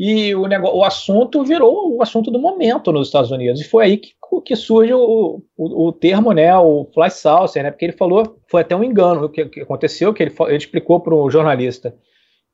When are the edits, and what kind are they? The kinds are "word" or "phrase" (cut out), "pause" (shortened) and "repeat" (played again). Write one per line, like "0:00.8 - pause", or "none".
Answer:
0:05.5 - pause
0:08.4 - pause